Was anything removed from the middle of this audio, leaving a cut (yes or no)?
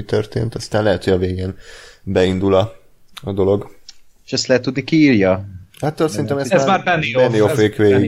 no